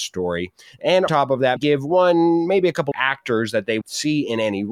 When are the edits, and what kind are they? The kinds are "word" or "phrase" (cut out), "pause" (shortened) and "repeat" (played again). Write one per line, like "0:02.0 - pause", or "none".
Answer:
0:01.1 - word
0:01.6 - word
0:02.9 - word
0:03.8 - word